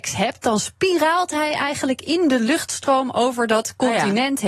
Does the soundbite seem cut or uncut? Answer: uncut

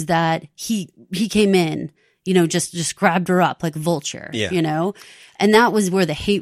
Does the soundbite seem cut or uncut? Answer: uncut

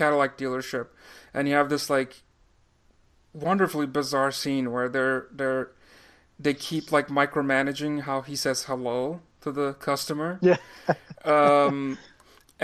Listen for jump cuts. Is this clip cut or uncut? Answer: uncut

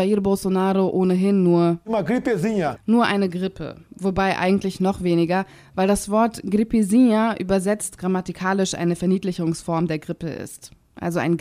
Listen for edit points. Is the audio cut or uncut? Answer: uncut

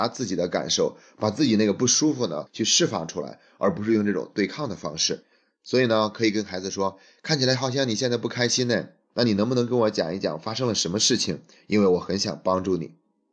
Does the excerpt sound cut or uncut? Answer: uncut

